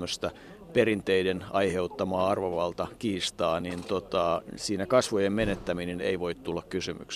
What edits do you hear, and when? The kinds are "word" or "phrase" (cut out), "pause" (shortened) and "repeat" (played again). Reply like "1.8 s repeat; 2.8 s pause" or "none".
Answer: none